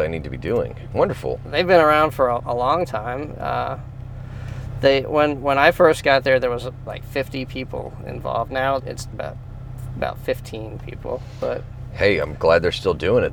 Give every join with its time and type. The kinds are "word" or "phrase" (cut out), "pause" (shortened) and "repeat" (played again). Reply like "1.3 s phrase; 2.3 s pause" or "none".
2.4 s word; 6.9 s word; 8.8 s word; 9.1 s word